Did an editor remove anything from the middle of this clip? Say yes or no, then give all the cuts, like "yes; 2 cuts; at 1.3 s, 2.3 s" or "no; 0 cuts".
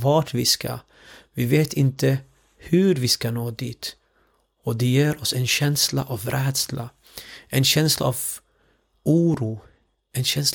no; 0 cuts